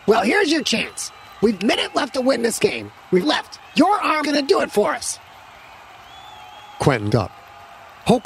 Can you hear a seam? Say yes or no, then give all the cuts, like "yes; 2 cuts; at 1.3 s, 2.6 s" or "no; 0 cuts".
yes; 5 cuts; at 1.6 s, 3.2 s, 3.6 s, 4.2 s, 7.1 s